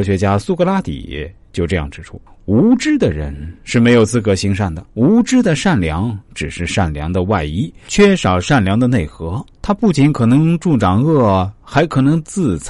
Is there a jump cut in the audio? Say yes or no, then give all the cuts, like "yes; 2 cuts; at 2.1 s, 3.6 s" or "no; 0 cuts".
yes; 3 cuts; at 2.3 s, 4.9 s, 9.5 s